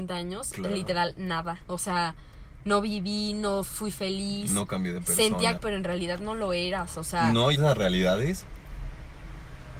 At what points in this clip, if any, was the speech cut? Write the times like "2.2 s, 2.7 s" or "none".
5.6 s, 7.5 s